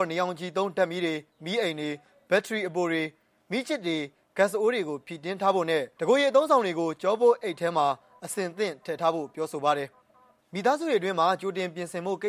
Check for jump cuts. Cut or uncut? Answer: uncut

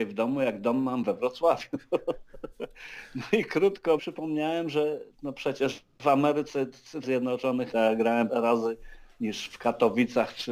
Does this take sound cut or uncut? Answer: cut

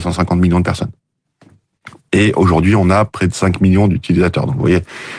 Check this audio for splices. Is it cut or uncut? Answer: uncut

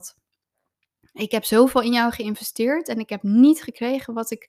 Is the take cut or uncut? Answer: uncut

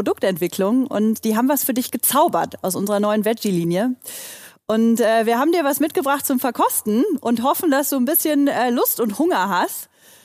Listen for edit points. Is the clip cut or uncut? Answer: uncut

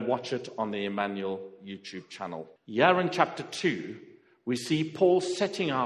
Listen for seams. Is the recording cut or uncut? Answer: cut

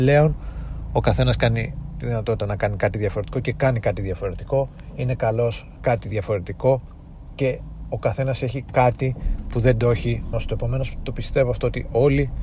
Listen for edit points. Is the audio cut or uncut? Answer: cut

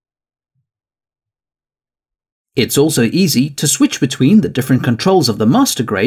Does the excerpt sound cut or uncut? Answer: uncut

